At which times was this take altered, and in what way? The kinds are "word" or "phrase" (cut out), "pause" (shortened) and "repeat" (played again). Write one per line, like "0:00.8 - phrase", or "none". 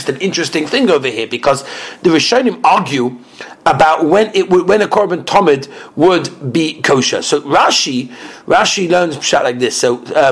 none